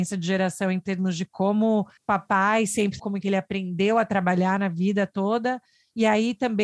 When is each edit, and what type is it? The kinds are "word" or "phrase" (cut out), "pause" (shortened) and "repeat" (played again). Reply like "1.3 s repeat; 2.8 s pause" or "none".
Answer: 2.0 s pause; 3.0 s word